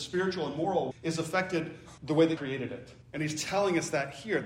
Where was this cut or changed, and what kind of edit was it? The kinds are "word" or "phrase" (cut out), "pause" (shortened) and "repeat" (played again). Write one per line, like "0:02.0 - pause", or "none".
0:00.9 - word
0:02.0 - word
0:02.4 - word
0:03.0 - pause